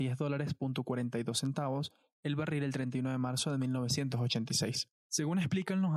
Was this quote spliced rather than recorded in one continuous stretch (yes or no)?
no